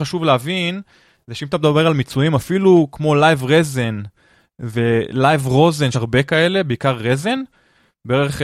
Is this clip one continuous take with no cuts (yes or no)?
no